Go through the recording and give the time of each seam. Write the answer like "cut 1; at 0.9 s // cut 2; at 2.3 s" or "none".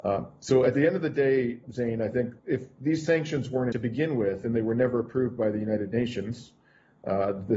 cut 1; at 1.6 s // cut 2; at 2.4 s // cut 3; at 3.7 s

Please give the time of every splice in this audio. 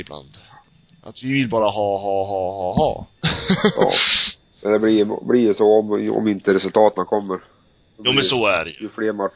none

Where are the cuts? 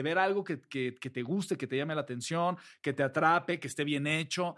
none

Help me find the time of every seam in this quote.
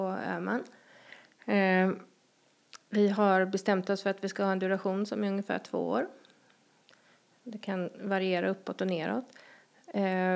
none

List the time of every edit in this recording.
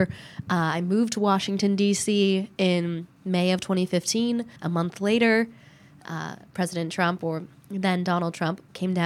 cut 1; at 4.6 s

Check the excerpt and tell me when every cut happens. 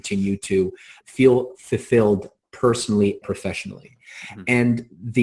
cut 1; at 1.0 s // cut 2; at 3.2 s

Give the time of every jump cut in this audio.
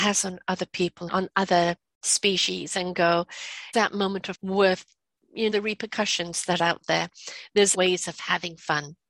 cut 1; at 1.1 s // cut 2; at 3.7 s // cut 3; at 4.3 s // cut 4; at 5.5 s // cut 5; at 6.6 s // cut 6; at 7.7 s

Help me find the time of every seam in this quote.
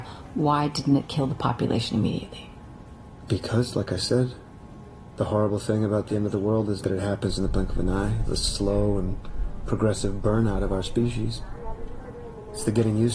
cut 1; at 6.8 s // cut 2; at 8.2 s

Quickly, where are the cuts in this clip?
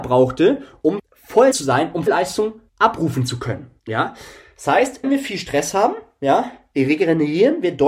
cut 1; at 1.0 s // cut 2; at 1.5 s // cut 3; at 2.1 s // cut 4; at 2.7 s // cut 5; at 3.8 s // cut 6; at 5.0 s

